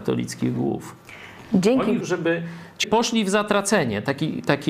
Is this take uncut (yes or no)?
no